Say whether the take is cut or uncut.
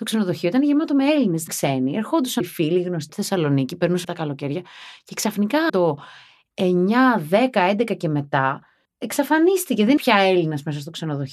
cut